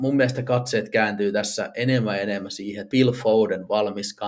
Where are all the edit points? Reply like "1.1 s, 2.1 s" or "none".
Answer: 2.9 s